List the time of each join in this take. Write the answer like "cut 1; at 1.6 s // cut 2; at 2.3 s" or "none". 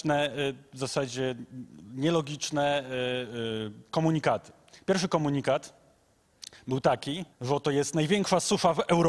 cut 1; at 7.3 s